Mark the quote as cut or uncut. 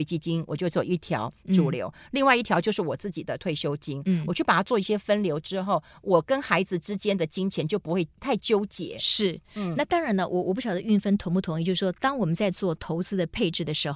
uncut